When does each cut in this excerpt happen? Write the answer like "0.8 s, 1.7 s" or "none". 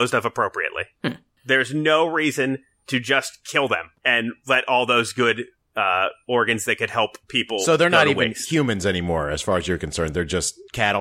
3.9 s, 7.2 s